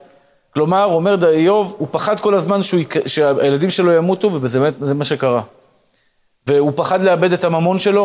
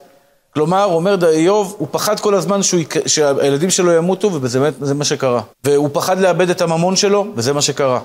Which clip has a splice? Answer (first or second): second